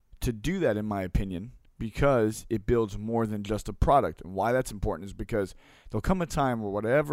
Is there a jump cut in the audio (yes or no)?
yes